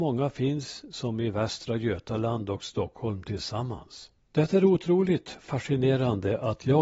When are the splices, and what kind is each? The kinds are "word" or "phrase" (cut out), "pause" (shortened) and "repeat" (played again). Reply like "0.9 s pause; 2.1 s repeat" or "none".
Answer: 4.2 s pause